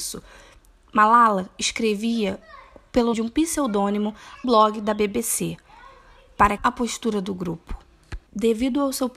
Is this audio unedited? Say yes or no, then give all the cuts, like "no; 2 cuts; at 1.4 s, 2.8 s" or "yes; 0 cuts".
no; 4 cuts; at 3.1 s, 4.4 s, 6.6 s, 8.3 s